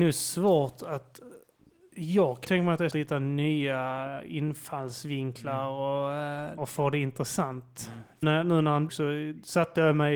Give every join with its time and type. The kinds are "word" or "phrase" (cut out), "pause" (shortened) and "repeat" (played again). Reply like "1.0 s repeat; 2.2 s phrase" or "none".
2.4 s word; 2.9 s word; 6.6 s word; 8.2 s word; 8.9 s word